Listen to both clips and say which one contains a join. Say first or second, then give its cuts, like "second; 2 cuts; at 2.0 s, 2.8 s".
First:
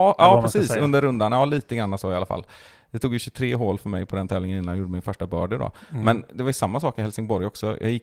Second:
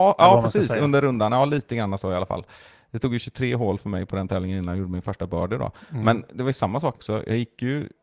second; 1 cut; at 6.9 s